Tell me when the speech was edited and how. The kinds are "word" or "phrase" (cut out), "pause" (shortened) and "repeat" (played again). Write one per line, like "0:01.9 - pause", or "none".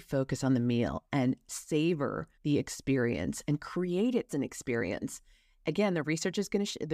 0:02.3 - pause
0:04.3 - word